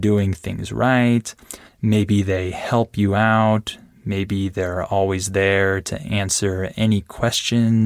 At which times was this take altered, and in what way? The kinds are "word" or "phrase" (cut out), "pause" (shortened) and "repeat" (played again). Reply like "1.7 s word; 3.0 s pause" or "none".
1.7 s pause

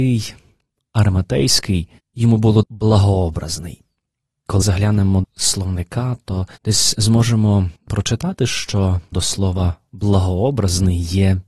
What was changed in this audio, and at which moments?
2.0 s pause; 2.6 s phrase; 4.6 s word; 5.2 s word; 6.6 s pause; 7.8 s pause; 9.1 s word

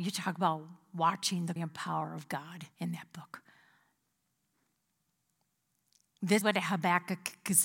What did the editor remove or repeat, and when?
1.6 s word; 2.7 s pause; 6.4 s word

